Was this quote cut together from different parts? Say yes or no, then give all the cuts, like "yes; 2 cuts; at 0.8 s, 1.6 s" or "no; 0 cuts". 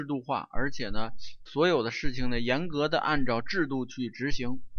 yes; 1 cut; at 1.5 s